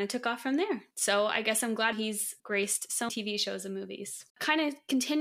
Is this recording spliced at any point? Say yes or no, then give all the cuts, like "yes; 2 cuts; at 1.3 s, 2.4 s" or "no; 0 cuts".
yes; 5 cuts; at 0.9 s, 1.9 s, 2.4 s, 3.1 s, 4.3 s